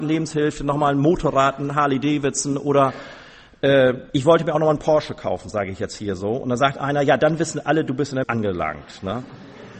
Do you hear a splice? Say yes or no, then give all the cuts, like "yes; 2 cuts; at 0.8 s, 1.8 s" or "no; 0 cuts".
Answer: yes; 2 cuts; at 4.1 s, 8.2 s